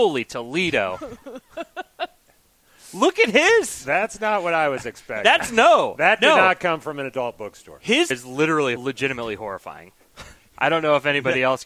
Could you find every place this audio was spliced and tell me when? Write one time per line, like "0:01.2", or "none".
0:08.1
0:08.8